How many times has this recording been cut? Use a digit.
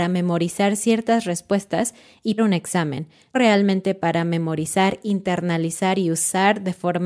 2